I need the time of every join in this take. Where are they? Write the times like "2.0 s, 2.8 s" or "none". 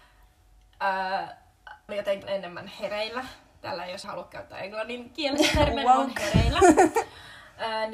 1.9 s, 2.2 s, 4.0 s